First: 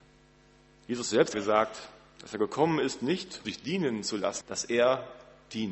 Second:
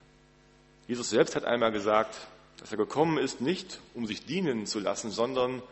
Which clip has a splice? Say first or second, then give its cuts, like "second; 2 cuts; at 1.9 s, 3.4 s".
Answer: first; 3 cuts; at 1.3 s, 3.4 s, 4.4 s